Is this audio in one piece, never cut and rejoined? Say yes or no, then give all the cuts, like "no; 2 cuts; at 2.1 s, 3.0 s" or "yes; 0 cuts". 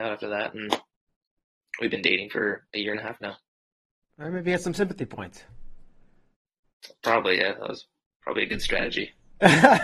yes; 0 cuts